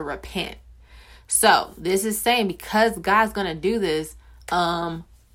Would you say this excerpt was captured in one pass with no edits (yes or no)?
yes